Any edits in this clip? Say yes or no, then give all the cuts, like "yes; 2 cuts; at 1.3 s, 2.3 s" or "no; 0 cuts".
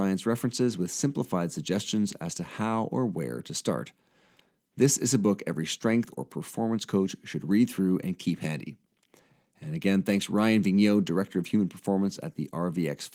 no; 0 cuts